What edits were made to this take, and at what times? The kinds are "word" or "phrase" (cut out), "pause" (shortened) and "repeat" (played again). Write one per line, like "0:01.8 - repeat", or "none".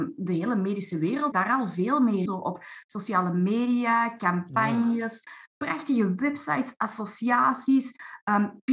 0:01.3 - word
0:02.3 - word

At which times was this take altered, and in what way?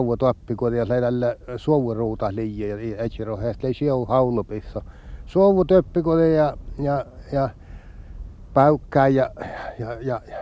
none

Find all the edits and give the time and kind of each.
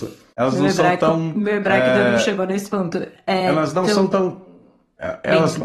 none

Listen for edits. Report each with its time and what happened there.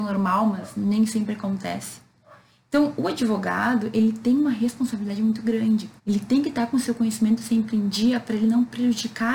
0:06.0 - pause

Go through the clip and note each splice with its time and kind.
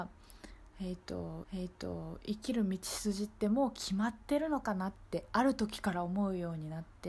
0:01.4 - repeat

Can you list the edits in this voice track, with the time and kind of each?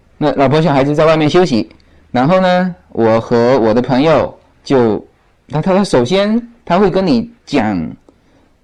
0:07.4 - pause

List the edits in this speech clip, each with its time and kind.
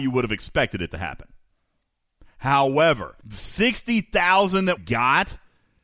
0:03.2 - pause
0:04.8 - word

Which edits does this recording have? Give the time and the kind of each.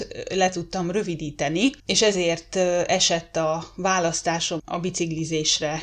0:01.8 - pause
0:04.6 - word

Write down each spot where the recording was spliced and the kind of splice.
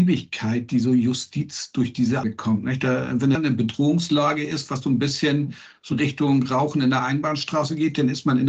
0:02.2 - word
0:03.3 - word
0:05.9 - word

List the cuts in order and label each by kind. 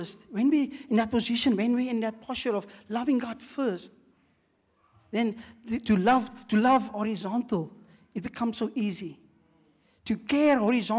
none

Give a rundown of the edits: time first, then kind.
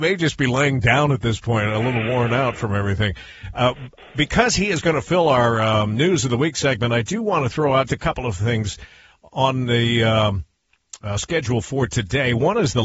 0:07.9 - word

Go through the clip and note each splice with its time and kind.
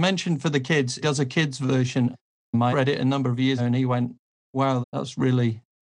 0:01.0 - word
0:02.7 - word
0:03.6 - word
0:04.8 - word

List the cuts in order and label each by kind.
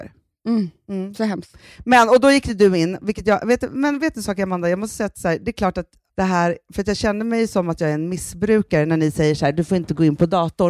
none

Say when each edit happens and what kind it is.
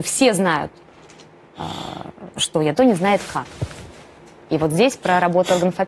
0:02.8 - phrase

